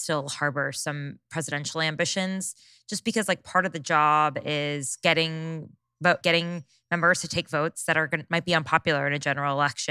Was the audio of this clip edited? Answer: yes; 1 cut; at 6.2 s

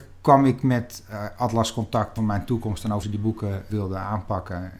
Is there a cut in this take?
yes; 3 cuts; at 2.2 s, 3.0 s, 3.7 s

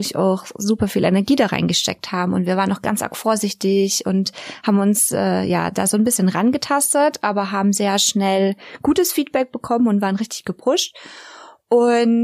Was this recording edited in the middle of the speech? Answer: no; 0 cuts

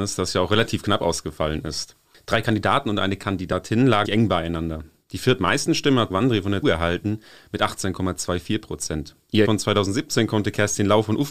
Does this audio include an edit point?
yes; 4 cuts; at 4.0 s, 6.1 s, 6.6 s, 9.4 s

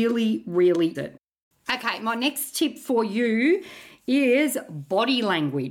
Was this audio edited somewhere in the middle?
yes; 1 cut; at 0.9 s

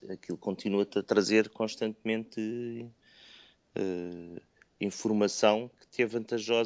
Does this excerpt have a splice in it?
no; 0 cuts

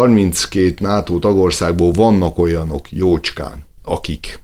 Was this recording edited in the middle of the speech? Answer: no; 0 cuts

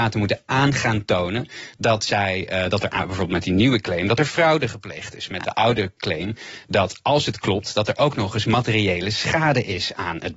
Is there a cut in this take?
no; 0 cuts

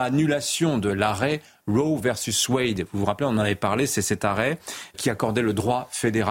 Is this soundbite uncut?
no; 1 cut; at 4.9 s

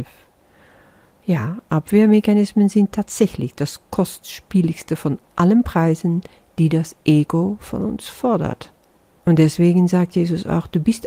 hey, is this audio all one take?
no; 1 cut; at 8.9 s

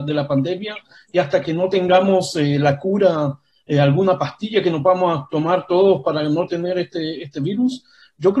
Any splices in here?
no; 0 cuts

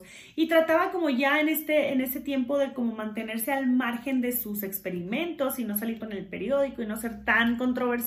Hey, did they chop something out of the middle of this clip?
yes; 1 cut; at 6.0 s

